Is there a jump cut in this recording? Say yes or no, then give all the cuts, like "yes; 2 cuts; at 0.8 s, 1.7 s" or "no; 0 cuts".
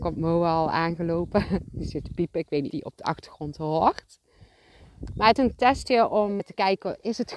yes; 4 cuts; at 2.0 s, 2.7 s, 5.4 s, 6.4 s